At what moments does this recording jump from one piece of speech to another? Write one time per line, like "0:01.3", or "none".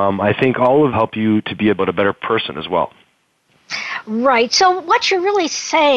0:00.9
0:01.8